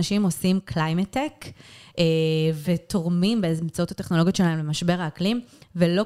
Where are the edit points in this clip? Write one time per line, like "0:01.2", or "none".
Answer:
none